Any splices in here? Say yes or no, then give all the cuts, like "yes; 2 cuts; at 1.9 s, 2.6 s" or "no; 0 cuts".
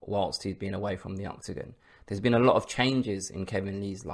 no; 0 cuts